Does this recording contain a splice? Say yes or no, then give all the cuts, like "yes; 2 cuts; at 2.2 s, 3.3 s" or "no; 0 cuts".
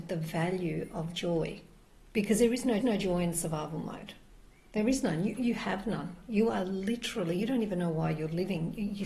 yes; 2 cuts; at 1.9 s, 2.8 s